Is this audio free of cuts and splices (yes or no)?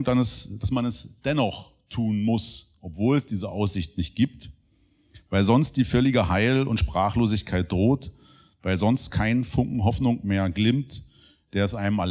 yes